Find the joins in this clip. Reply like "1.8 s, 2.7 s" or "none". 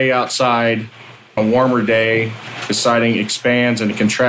1.4 s